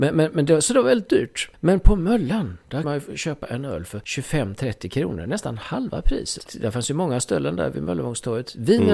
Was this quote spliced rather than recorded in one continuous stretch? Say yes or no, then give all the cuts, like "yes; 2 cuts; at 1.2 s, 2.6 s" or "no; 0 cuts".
yes; 1 cut; at 2.8 s